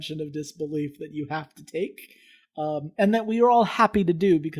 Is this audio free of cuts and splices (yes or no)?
yes